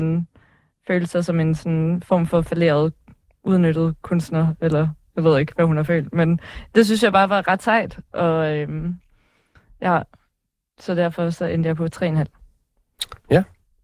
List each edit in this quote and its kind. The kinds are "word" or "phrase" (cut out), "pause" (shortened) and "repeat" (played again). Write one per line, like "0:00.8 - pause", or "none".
none